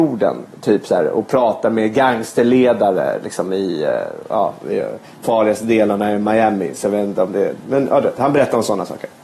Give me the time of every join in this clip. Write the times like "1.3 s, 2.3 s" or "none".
5.2 s